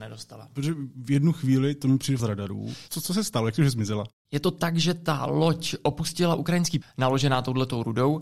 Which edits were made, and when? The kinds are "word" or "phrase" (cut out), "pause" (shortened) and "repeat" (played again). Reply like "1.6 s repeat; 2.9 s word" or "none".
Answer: 2.2 s phrase; 6.8 s word